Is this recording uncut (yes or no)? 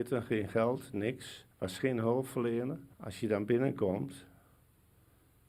no